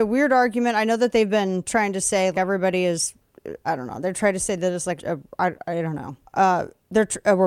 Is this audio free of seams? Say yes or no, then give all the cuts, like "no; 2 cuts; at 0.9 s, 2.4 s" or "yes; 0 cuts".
no; 4 cuts; at 2.3 s, 3.6 s, 5.0 s, 6.3 s